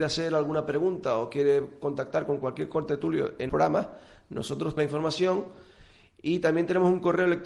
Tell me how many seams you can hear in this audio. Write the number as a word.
two